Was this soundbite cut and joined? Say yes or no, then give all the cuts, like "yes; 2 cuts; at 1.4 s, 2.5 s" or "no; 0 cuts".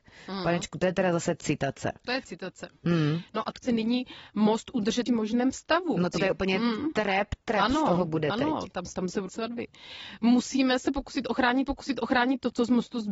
yes; 7 cuts; at 3.6 s, 5.1 s, 6.2 s, 7.4 s, 8.9 s, 9.3 s, 11.7 s